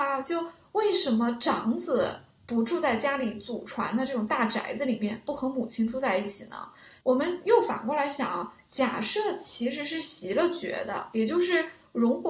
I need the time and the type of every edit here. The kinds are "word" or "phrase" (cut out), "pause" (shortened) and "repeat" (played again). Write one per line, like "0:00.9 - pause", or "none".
none